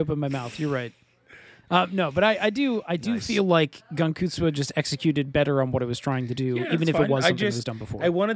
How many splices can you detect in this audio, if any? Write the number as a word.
zero